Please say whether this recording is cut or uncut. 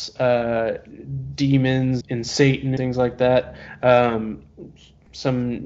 cut